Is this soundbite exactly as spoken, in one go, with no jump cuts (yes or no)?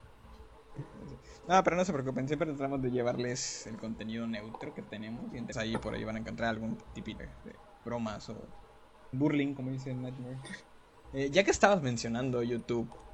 no